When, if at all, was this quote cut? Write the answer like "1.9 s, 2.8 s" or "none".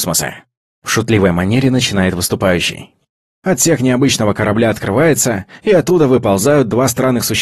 none